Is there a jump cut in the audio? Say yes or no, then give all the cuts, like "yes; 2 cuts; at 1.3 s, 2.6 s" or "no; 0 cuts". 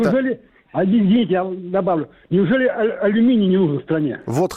no; 0 cuts